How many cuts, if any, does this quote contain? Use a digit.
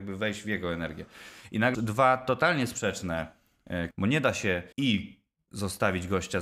3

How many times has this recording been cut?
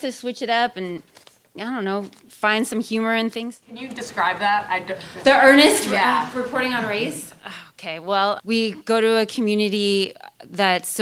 1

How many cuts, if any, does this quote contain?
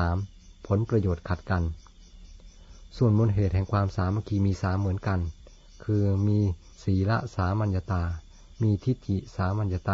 1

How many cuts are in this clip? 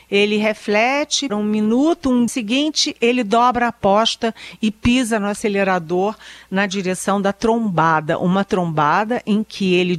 2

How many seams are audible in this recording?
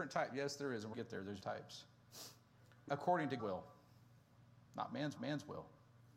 6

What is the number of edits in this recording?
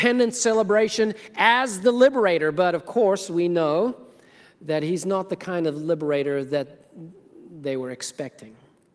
0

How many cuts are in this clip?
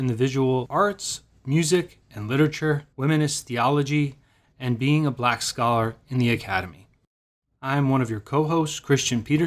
1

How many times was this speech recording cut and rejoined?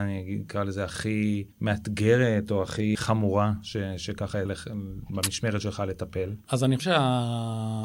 4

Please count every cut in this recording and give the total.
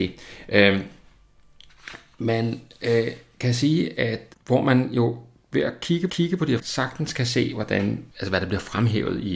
4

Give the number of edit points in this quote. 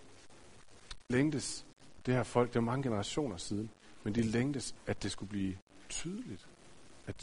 2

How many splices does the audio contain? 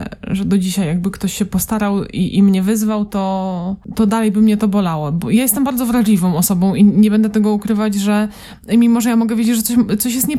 0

